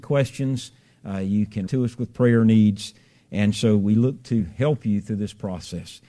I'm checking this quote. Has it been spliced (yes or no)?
yes